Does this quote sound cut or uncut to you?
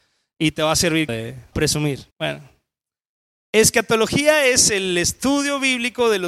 cut